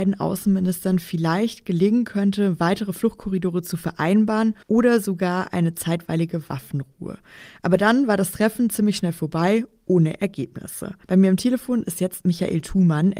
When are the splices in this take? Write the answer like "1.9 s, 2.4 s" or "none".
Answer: 4.6 s, 11.0 s